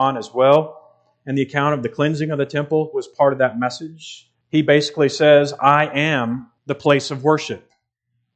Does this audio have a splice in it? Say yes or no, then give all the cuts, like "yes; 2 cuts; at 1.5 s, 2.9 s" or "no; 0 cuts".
yes; 2 cuts; at 4.4 s, 6.6 s